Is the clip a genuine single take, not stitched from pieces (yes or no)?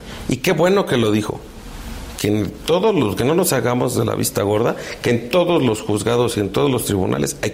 yes